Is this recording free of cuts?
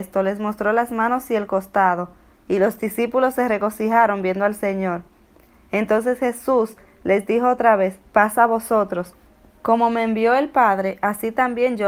yes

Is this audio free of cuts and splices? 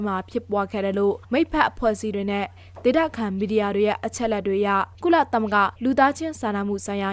no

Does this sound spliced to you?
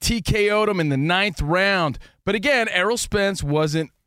no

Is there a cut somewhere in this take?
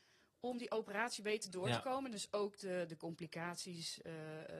no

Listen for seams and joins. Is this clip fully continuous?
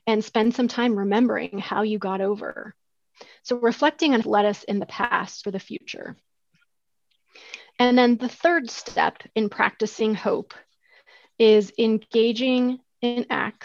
no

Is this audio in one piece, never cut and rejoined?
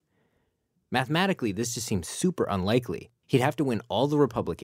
no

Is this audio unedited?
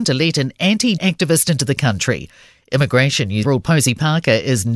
no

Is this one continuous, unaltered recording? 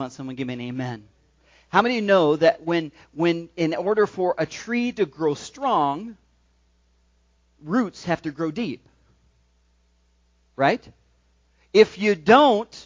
yes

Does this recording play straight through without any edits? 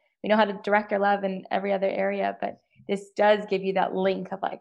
yes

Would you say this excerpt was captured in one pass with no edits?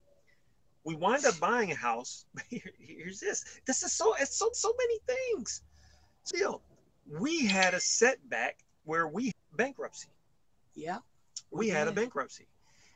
no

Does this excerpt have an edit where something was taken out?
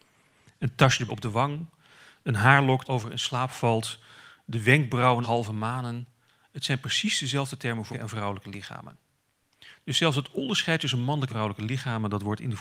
yes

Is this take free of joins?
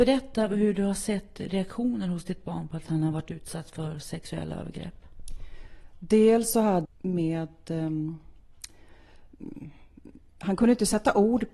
no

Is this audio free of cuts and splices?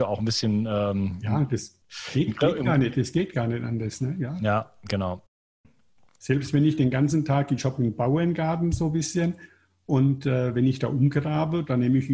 yes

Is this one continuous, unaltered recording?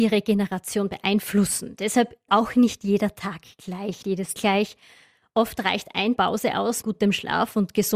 no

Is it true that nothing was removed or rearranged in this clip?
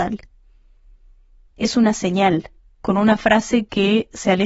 no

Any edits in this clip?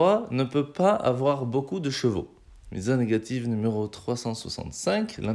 no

